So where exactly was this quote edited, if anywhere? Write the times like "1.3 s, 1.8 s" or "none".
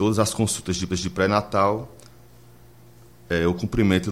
0.9 s